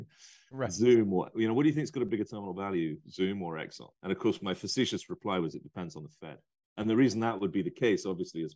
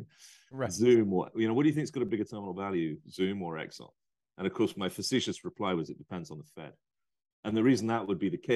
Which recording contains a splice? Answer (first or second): first